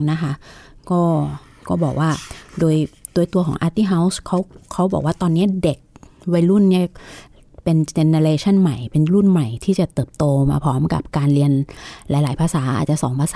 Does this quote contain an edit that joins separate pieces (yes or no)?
no